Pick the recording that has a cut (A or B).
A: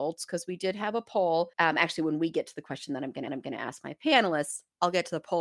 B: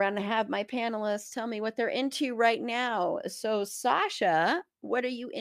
A